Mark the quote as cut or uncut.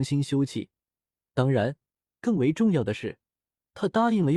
uncut